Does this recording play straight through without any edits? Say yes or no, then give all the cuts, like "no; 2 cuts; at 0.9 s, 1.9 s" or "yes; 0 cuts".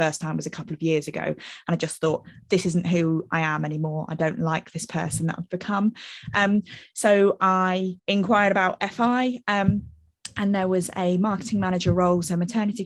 no; 2 cuts; at 2.4 s, 8.0 s